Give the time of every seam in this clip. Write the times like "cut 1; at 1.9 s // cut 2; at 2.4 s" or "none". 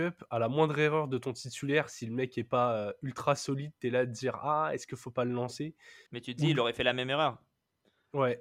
cut 1; at 6.1 s